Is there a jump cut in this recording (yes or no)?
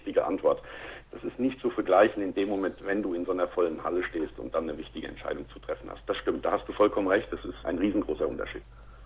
no